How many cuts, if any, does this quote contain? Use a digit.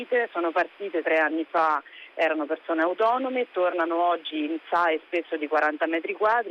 0